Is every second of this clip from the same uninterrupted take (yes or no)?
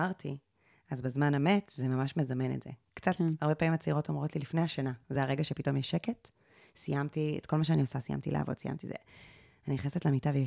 yes